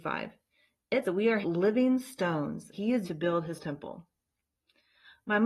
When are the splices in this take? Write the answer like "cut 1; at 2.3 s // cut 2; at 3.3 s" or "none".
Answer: cut 1; at 1.0 s // cut 2; at 1.4 s // cut 3; at 2.7 s // cut 4; at 3.0 s // cut 5; at 3.6 s